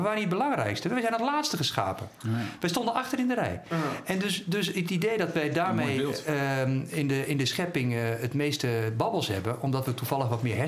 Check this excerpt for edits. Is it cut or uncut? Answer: uncut